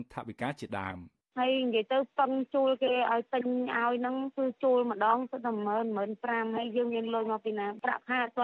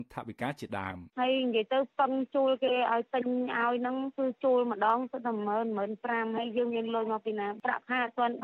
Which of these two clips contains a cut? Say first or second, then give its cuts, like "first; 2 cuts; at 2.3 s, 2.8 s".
second; 1 cut; at 1.1 s